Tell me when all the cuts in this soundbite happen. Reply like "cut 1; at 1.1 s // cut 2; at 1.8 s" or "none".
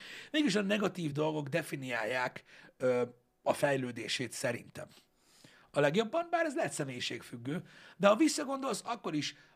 none